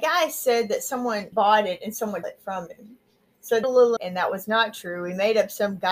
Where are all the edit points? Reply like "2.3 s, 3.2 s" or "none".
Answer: 1.3 s, 2.2 s, 3.6 s, 4.0 s